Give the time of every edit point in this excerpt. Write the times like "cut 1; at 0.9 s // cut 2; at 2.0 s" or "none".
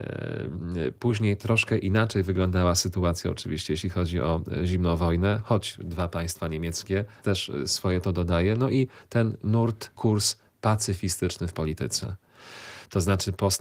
cut 1; at 7.2 s // cut 2; at 10.0 s